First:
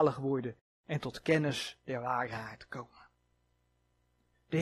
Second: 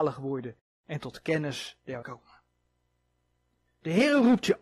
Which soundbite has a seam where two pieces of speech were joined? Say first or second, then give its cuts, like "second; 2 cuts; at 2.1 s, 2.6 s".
second; 1 cut; at 2.0 s